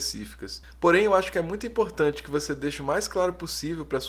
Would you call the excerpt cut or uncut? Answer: uncut